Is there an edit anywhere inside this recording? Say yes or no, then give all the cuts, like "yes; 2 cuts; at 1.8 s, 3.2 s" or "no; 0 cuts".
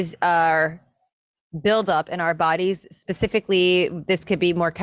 no; 0 cuts